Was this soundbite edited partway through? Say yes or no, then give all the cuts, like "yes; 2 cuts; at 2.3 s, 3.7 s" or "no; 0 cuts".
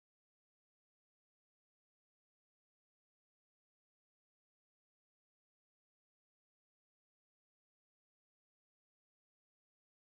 no; 0 cuts